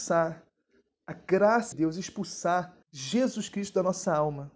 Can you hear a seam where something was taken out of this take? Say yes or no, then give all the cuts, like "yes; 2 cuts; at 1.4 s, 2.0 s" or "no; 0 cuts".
yes; 2 cuts; at 1.7 s, 2.8 s